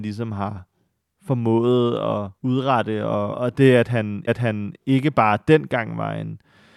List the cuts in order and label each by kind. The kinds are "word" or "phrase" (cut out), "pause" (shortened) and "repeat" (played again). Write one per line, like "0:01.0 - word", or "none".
0:02.4 - pause
0:03.3 - word
0:04.3 - repeat